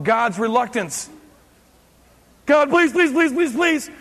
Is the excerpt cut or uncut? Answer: uncut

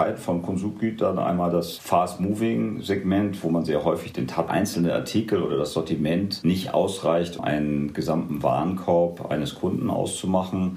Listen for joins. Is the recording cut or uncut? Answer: cut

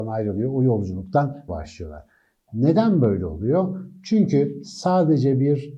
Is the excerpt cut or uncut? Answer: cut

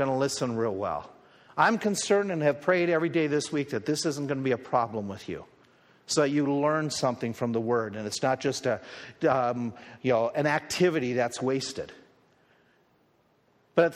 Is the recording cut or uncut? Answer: uncut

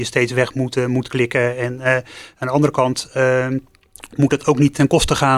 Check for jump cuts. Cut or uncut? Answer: uncut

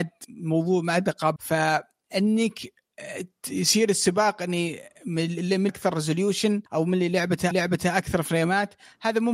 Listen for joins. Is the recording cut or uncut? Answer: cut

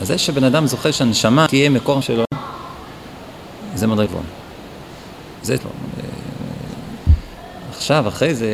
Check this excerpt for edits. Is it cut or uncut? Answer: cut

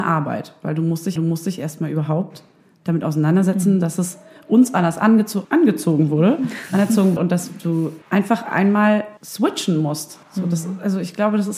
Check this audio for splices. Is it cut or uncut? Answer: cut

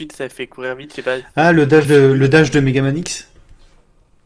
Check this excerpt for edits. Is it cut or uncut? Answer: uncut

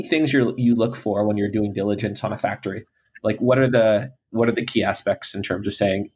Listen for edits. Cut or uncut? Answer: uncut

